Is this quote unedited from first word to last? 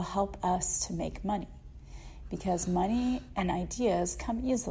yes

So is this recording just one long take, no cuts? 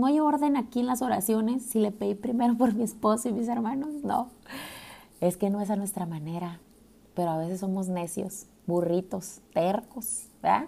yes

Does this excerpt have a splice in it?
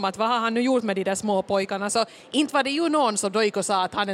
no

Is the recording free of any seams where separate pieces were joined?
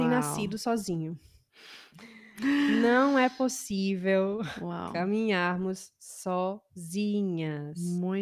yes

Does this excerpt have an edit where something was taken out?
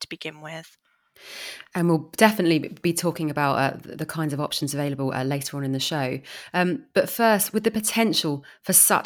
no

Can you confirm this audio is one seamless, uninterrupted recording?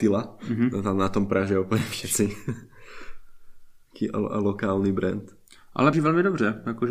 no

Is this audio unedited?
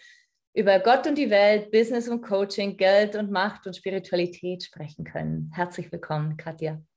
yes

